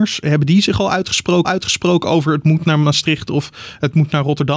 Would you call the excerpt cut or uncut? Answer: cut